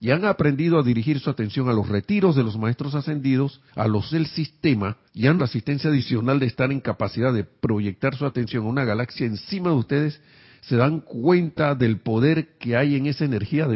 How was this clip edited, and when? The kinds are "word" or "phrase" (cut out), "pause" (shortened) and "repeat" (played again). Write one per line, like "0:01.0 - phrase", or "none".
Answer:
0:03.7 - pause
0:04.1 - word
0:05.1 - pause
0:05.4 - word